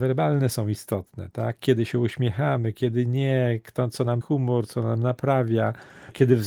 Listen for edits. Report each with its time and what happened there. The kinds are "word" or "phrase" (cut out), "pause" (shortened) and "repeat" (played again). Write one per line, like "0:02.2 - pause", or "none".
0:04.2 - word